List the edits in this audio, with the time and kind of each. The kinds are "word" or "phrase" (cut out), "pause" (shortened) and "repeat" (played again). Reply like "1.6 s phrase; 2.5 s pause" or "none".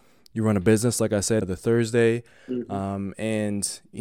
1.4 s word